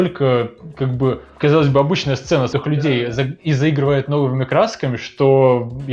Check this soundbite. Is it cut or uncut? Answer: cut